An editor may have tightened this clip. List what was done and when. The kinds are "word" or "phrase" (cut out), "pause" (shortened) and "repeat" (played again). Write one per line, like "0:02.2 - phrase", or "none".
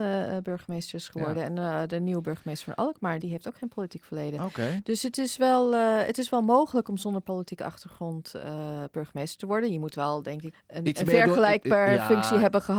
0:03.2 - word
0:10.5 - word